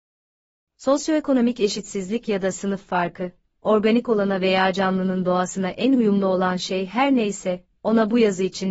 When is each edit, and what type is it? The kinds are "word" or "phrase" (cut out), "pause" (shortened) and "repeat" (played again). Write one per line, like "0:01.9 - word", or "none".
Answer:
none